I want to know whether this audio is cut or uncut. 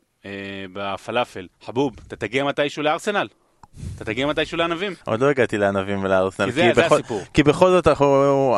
cut